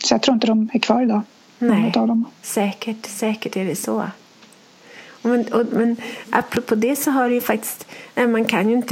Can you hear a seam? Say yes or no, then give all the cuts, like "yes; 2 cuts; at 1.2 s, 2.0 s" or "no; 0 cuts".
no; 0 cuts